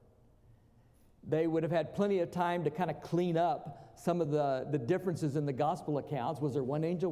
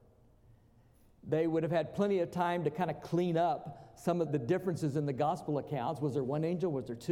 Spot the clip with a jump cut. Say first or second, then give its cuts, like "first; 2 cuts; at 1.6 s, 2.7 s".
second; 1 cut; at 4.2 s